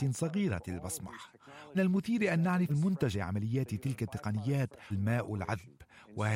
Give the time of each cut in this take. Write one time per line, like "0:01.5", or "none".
0:01.7
0:02.7
0:03.1
0:04.9